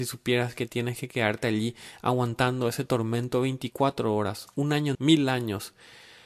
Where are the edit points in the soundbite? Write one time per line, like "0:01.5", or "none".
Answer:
0:04.9